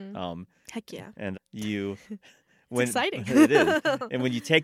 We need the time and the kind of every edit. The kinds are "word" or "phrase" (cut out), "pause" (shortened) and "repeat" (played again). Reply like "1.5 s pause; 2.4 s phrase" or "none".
1.3 s phrase